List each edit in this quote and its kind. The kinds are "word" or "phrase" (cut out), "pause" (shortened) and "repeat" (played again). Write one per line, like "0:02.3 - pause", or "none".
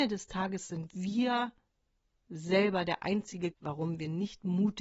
0:03.5 - word